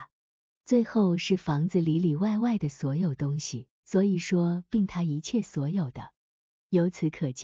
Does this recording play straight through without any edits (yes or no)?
no